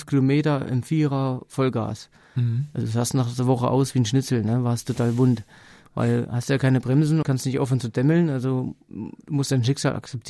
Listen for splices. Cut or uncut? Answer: cut